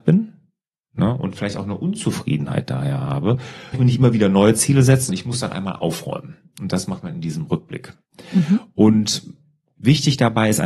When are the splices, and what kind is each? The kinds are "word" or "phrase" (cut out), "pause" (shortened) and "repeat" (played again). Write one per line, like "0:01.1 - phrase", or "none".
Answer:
0:03.7 - word
0:05.1 - word